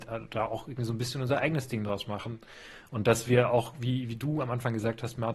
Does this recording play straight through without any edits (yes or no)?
yes